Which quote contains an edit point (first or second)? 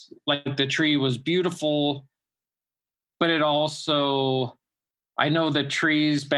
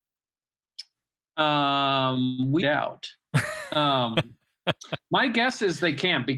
second